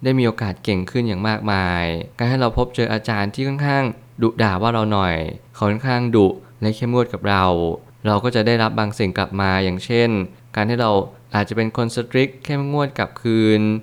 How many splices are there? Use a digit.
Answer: 1